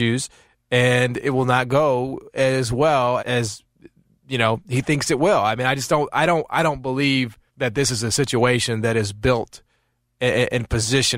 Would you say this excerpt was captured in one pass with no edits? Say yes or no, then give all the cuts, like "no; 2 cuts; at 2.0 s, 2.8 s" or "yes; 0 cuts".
no; 2 cuts; at 3.2 s, 7.5 s